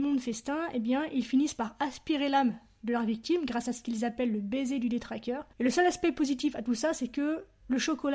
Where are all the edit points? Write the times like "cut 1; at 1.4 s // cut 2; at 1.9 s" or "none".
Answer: cut 1; at 5.5 s